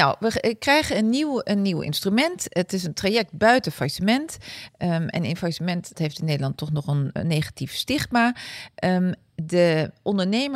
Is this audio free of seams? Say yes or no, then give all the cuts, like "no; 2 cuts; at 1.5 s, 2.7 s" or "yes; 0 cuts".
no; 2 cuts; at 5.9 s, 7.2 s